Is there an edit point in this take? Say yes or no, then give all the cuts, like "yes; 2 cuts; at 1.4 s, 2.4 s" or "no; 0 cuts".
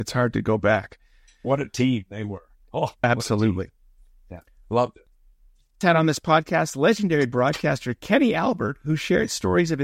yes; 1 cut; at 5.8 s